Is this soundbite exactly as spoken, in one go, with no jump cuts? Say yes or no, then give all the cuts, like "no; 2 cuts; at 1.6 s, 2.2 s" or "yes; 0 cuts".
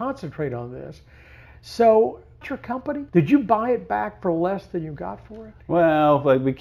no; 2 cuts; at 2.4 s, 3.1 s